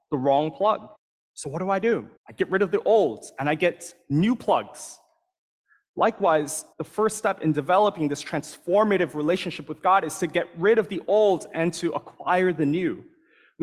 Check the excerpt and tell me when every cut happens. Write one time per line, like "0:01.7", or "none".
0:01.0
0:02.2
0:06.7